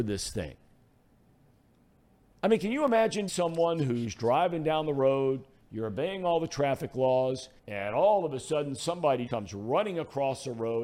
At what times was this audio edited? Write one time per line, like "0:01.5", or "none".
0:03.3
0:07.6
0:09.3

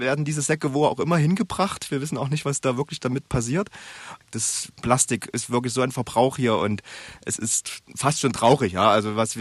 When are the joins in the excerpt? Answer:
0:07.8

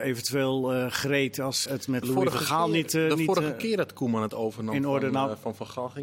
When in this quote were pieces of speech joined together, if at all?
0:01.7
0:02.0

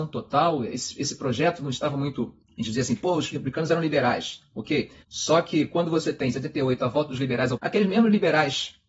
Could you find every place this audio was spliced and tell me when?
0:02.4
0:05.0
0:07.6

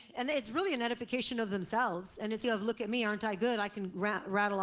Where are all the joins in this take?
0:02.4

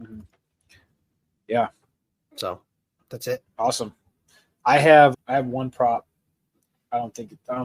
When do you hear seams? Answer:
0:05.1

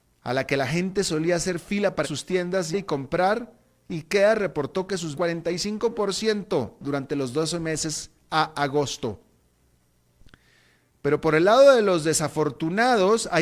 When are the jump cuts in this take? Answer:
0:02.0
0:02.7
0:05.1

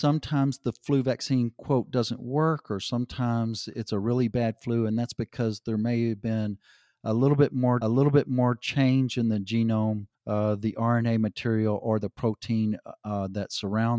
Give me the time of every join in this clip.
0:07.8
0:10.1

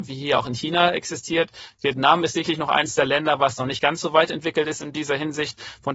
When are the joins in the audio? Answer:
none

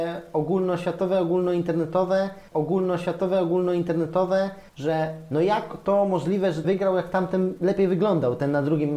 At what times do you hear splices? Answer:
0:02.5
0:06.6

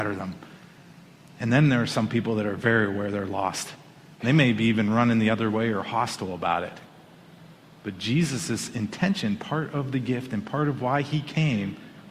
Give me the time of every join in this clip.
none

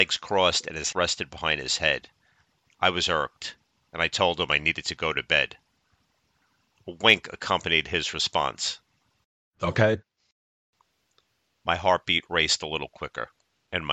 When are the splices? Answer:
0:00.9

